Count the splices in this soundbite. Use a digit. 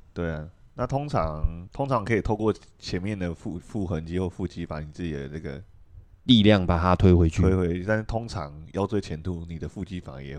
1